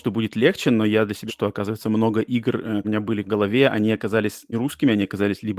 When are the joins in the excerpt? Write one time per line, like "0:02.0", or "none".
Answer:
0:01.3
0:02.8
0:03.2
0:04.5